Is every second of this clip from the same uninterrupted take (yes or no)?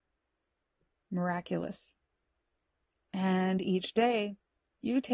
yes